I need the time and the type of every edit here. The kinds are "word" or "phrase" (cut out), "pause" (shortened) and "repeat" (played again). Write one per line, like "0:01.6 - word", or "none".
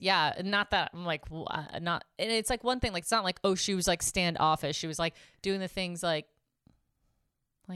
none